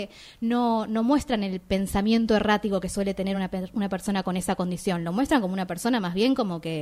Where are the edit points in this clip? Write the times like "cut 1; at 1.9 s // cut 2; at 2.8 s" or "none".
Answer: none